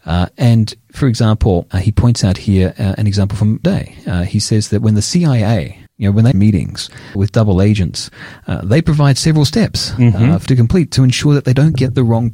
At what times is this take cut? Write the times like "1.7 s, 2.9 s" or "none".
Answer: 1.7 s, 3.6 s, 5.9 s, 6.3 s, 7.1 s, 10.5 s